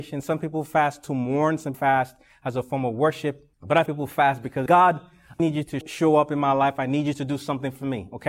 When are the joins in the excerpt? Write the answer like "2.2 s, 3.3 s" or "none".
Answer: 1.7 s, 3.5 s, 3.9 s, 4.7 s, 5.4 s, 5.8 s